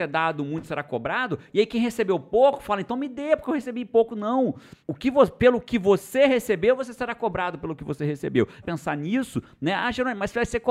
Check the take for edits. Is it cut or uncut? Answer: cut